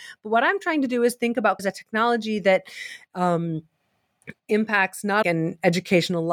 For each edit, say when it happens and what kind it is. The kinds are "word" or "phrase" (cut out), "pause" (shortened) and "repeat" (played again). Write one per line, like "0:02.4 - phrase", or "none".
0:01.6 - word
0:05.2 - phrase